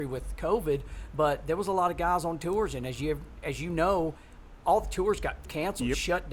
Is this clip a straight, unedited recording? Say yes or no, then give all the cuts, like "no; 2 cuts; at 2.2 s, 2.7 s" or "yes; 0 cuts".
yes; 0 cuts